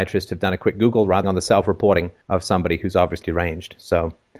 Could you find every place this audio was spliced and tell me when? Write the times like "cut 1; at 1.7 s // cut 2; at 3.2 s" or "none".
cut 1; at 1.2 s // cut 2; at 2.2 s // cut 3; at 3.2 s